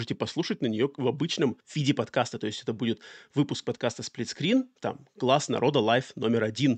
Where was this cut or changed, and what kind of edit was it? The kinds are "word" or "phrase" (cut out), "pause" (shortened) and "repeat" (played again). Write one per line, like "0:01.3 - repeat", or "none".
0:01.6 - pause